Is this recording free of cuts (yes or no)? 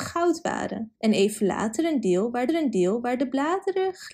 no